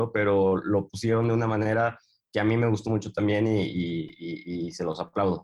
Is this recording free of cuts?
yes; 0 cuts

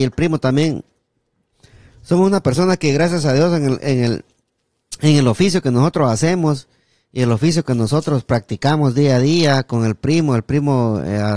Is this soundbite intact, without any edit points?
yes; 0 cuts

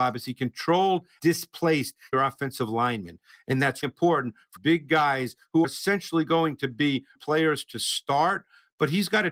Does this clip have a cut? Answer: yes; 6 cuts; at 1.2 s, 2.1 s, 3.8 s, 4.6 s, 5.6 s, 7.2 s

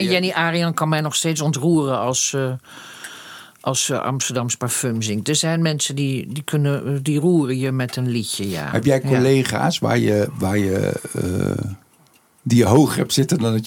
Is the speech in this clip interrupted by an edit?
no; 0 cuts

